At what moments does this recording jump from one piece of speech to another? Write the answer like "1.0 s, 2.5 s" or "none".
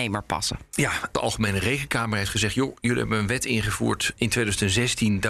none